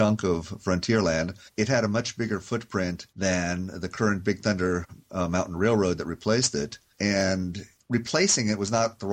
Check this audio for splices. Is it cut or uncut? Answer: cut